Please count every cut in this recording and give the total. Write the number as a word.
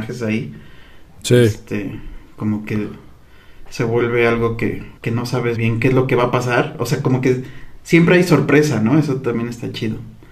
two